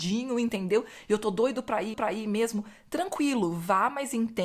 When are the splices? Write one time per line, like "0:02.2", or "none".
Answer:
0:01.9

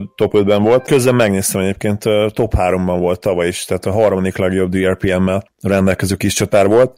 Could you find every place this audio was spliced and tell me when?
none

